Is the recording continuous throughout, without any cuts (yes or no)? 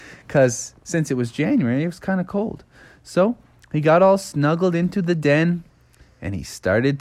yes